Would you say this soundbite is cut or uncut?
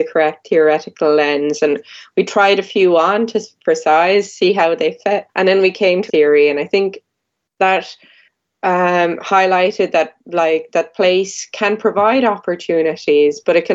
cut